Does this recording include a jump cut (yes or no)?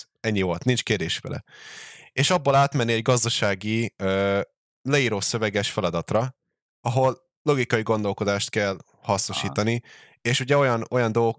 no